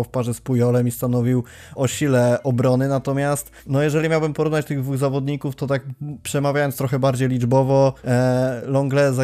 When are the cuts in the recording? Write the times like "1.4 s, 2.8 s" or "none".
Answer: 1.7 s, 3.6 s, 5.6 s, 8.0 s